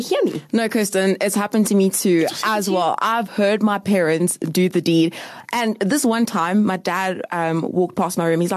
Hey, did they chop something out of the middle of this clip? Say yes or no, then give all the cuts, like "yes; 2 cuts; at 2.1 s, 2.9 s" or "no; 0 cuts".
no; 0 cuts